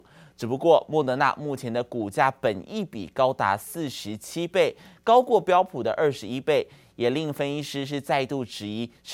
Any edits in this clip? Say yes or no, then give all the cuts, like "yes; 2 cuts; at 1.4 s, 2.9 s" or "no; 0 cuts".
no; 0 cuts